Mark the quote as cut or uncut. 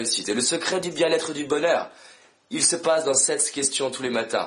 uncut